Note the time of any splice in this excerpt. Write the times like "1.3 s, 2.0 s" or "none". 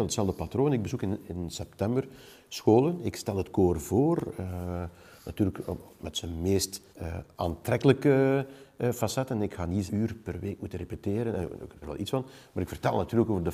6.9 s, 9.9 s, 11.8 s